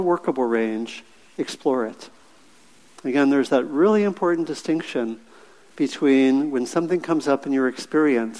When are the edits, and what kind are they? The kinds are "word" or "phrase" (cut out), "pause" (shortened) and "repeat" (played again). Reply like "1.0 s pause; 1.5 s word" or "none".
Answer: none